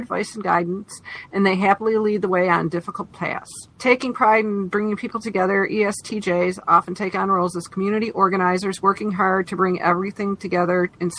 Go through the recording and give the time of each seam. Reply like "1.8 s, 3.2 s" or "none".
none